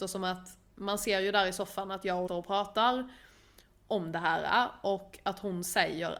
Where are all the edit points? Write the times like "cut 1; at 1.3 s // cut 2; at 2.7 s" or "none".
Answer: cut 1; at 2.3 s

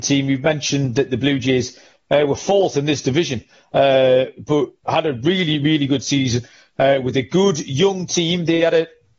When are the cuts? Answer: none

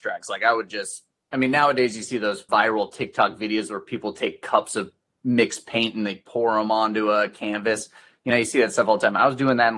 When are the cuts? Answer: none

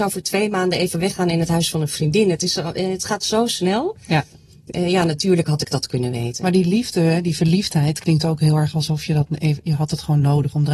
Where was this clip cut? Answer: none

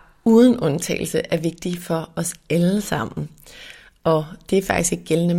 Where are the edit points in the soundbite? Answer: none

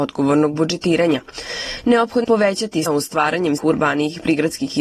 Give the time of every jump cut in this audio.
cut 1; at 2.2 s // cut 2; at 2.9 s // cut 3; at 3.6 s

